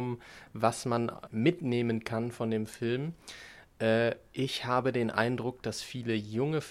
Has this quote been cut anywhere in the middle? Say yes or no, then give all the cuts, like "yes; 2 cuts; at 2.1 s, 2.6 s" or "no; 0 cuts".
yes; 1 cut; at 1.3 s